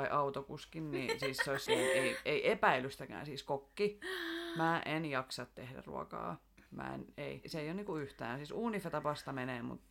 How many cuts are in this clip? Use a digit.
3